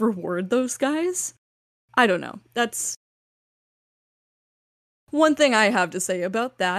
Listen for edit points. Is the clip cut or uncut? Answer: uncut